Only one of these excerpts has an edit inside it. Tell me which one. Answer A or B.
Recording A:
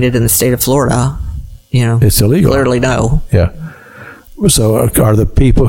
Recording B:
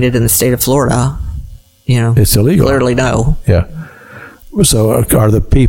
A